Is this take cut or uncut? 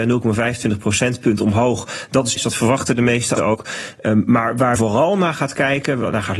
cut